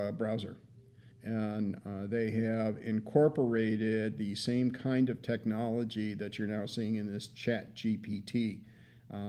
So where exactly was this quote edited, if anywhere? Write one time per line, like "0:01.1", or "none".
0:01.1